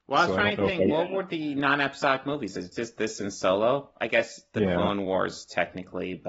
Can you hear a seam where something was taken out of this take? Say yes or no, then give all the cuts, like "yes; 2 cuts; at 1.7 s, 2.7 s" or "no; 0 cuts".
no; 0 cuts